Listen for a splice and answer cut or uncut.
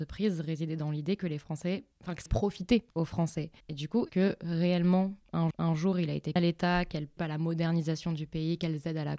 cut